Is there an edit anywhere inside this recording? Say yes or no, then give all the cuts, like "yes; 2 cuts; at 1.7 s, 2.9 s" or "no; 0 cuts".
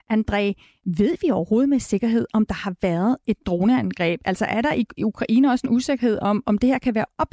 no; 0 cuts